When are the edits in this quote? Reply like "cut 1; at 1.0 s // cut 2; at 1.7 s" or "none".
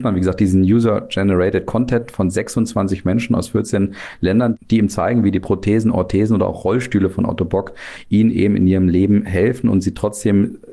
none